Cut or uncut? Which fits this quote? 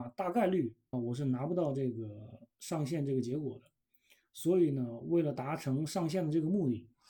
cut